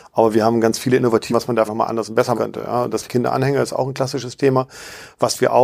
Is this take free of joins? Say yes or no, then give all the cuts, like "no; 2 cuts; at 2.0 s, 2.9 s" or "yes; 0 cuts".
no; 4 cuts; at 1.3 s, 1.7 s, 2.4 s, 3.1 s